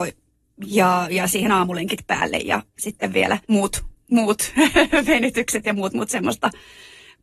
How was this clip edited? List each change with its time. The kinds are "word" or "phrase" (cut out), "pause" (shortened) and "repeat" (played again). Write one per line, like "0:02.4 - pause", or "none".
0:03.4 - pause